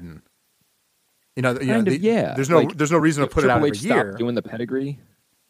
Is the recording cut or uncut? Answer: uncut